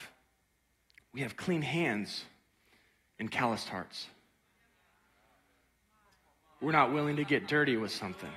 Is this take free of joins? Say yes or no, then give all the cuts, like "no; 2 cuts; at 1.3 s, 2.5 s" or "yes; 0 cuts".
yes; 0 cuts